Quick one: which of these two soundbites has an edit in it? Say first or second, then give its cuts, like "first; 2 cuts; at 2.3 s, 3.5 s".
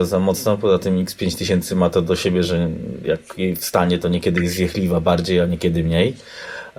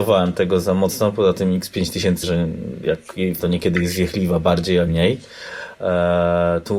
second; 3 cuts; at 2.2 s, 3.4 s, 4.9 s